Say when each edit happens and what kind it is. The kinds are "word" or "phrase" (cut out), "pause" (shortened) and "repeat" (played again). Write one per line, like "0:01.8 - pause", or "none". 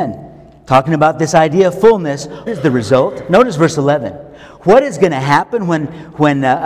0:02.5 - word